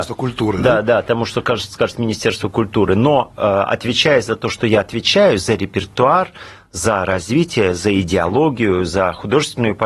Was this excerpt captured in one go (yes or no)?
yes